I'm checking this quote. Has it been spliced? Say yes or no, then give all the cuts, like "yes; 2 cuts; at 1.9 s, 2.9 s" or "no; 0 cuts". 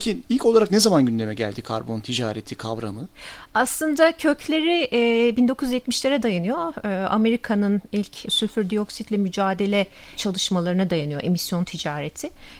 no; 0 cuts